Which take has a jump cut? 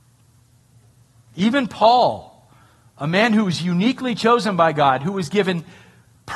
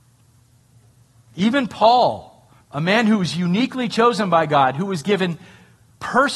second; 1 cut; at 2.6 s

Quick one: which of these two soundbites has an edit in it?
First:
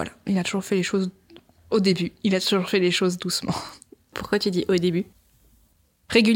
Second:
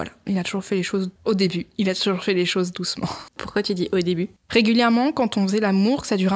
second; 3 cuts; at 1.2 s, 3.3 s, 4.4 s

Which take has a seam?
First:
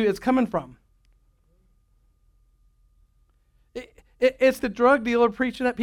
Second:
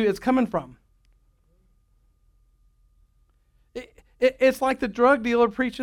first; 1 cut; at 4.6 s

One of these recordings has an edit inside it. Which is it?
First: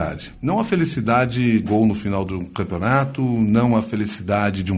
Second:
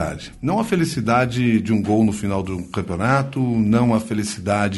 first; 1 cut; at 1.6 s

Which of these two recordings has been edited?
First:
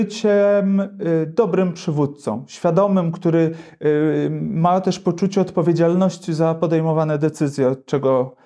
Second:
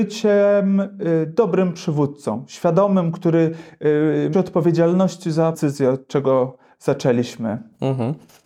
second; 2 cuts; at 4.3 s, 5.5 s

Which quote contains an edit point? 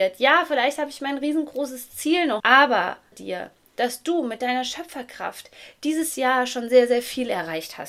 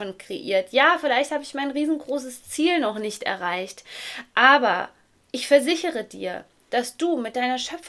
first; 2 cuts; at 2.4 s, 3.1 s

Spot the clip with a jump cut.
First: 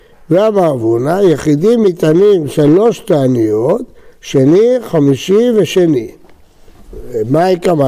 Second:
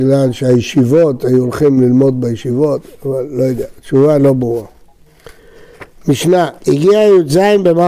second; 1 cut; at 6.6 s

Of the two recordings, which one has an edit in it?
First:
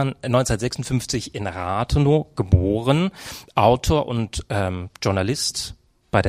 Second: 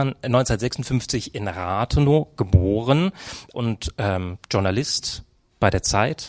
second; 1 cut; at 3.5 s

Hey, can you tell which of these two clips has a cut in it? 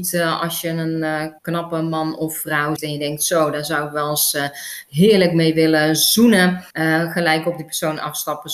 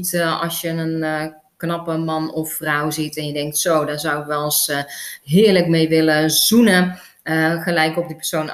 first; 3 cuts; at 1.4 s, 2.8 s, 6.7 s

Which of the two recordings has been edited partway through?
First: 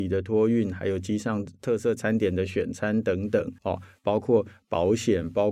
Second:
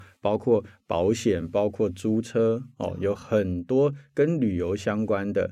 first; 1 cut; at 3.6 s

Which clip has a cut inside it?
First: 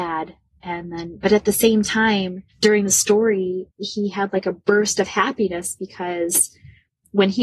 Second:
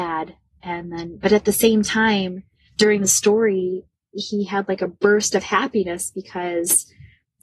first; 2 cuts; at 2.5 s, 3.7 s

